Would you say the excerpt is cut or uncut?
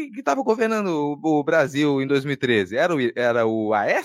uncut